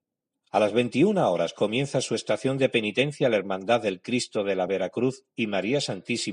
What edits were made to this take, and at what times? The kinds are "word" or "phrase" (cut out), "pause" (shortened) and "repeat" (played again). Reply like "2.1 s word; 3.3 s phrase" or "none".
none